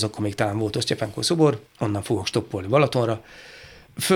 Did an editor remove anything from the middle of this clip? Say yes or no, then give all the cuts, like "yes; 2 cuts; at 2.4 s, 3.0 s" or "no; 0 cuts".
yes; 1 cut; at 1.7 s